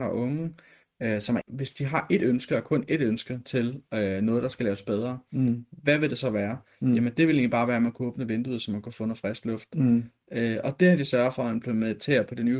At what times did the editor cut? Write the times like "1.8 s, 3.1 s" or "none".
1.4 s

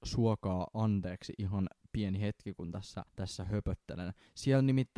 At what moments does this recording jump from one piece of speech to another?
3.1 s

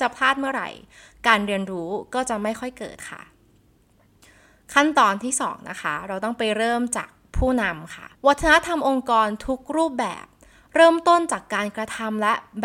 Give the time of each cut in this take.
8.2 s

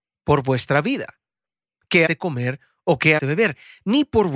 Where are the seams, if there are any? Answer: 2.1 s, 3.2 s

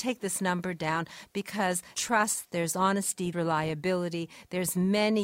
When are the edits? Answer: 1.9 s, 3.3 s

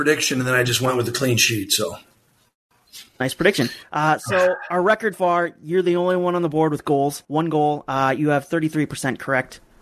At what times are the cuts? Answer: 3.1 s, 5.1 s, 7.2 s

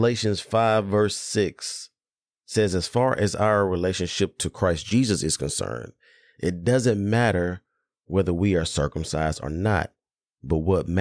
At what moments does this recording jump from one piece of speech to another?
none

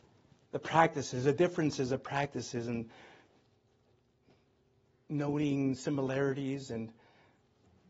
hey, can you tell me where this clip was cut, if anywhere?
none

